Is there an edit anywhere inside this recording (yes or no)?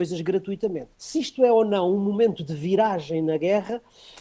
yes